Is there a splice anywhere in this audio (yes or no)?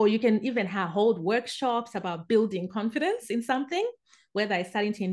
no